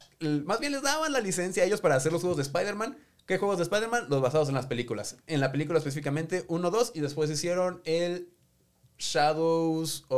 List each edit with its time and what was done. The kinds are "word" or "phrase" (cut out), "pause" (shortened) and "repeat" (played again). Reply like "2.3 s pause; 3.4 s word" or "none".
none